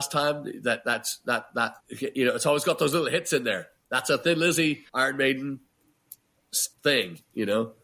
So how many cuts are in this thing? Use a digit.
3